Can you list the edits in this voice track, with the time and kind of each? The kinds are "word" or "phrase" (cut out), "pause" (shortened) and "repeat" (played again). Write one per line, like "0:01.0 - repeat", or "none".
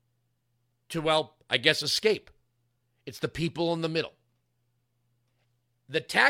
none